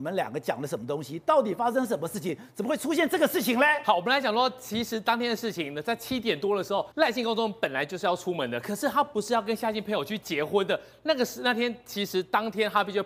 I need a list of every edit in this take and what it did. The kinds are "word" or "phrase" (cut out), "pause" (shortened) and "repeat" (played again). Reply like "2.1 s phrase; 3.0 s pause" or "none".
6.9 s pause